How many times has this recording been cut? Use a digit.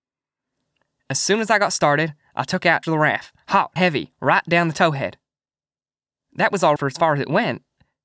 3